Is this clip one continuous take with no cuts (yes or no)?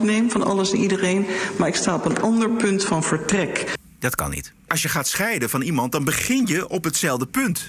yes